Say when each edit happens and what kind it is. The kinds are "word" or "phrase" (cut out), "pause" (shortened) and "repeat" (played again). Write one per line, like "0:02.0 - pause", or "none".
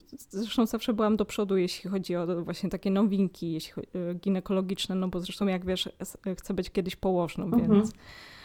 none